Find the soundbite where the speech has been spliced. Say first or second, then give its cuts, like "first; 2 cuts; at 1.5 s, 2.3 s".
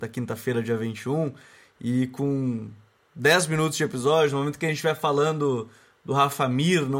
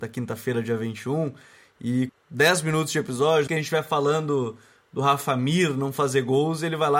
second; 2 cuts; at 2.1 s, 3.5 s